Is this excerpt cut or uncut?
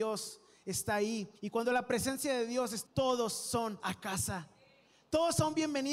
cut